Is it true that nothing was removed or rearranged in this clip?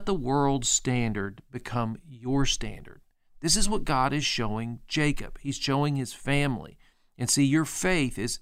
yes; 0 cuts

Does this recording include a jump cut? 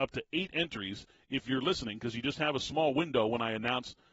no; 0 cuts

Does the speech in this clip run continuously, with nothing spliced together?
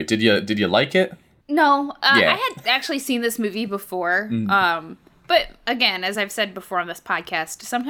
yes; 0 cuts

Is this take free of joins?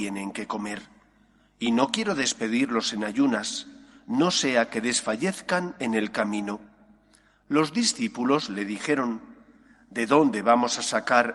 yes; 0 cuts

